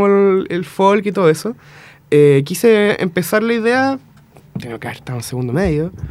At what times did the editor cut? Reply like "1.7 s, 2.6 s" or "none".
none